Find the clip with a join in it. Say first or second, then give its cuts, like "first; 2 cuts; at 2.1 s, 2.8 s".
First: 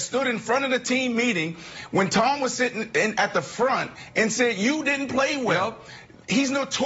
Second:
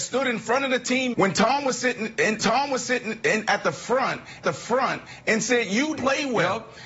second; 4 cuts; at 1.1 s, 2.4 s, 4.4 s, 6.0 s